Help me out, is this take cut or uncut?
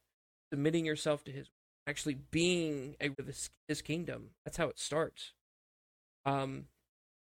cut